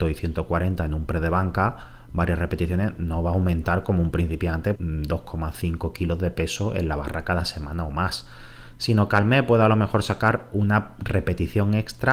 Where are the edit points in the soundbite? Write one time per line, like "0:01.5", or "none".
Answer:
0:04.8